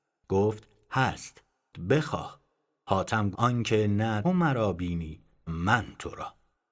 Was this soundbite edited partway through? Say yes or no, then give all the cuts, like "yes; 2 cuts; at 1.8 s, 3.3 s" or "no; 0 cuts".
yes; 4 cuts; at 1.7 s, 3.3 s, 4.2 s, 5.5 s